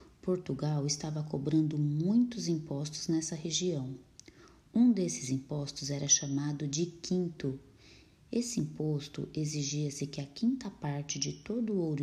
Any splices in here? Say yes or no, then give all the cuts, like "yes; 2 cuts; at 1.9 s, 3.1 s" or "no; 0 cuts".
no; 0 cuts